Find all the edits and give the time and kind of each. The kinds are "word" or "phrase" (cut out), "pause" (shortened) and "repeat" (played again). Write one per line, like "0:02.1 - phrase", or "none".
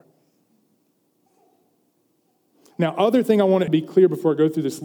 0:03.7 - phrase